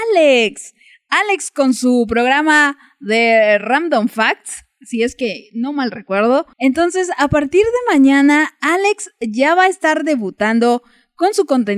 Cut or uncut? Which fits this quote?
cut